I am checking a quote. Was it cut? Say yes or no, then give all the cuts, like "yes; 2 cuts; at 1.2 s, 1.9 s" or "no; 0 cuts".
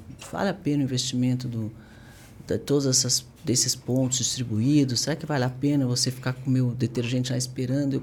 yes; 1 cut; at 3.4 s